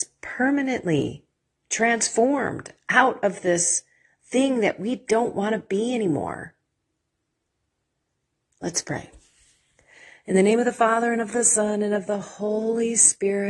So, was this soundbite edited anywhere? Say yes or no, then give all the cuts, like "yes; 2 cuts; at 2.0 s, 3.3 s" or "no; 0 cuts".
no; 0 cuts